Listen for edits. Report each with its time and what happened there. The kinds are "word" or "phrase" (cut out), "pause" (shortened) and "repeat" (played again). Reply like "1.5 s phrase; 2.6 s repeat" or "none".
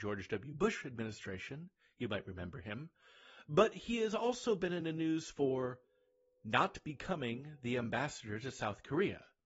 none